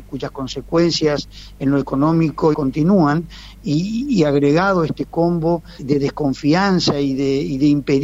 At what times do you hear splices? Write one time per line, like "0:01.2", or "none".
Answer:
0:02.5
0:05.8